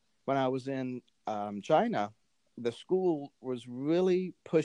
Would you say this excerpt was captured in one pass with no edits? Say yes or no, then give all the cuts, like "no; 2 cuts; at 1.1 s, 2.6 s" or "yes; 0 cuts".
yes; 0 cuts